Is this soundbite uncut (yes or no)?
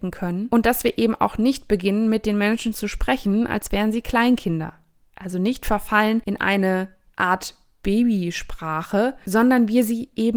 yes